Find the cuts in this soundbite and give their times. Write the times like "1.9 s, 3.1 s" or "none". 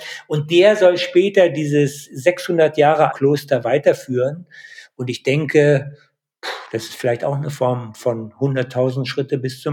3.1 s